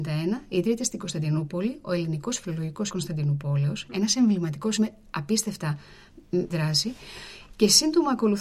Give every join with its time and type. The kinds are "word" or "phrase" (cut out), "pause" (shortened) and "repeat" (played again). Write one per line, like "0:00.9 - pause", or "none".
0:02.9 - word
0:04.8 - word
0:06.5 - word